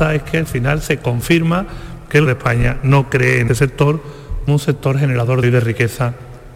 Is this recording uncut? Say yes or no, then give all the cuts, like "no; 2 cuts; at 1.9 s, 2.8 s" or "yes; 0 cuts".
no; 4 cuts; at 2.3 s, 3.5 s, 4.5 s, 5.4 s